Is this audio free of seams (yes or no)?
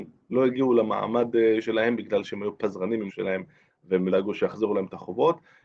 no